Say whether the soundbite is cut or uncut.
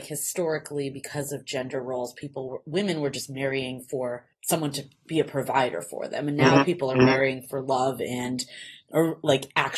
cut